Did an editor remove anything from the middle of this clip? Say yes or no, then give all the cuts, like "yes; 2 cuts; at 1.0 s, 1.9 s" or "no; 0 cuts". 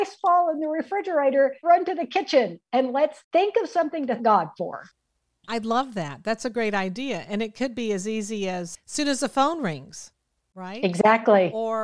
yes; 2 cuts; at 1.6 s, 4.2 s